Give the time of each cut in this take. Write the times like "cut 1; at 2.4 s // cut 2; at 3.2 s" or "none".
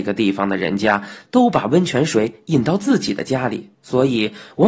cut 1; at 3.7 s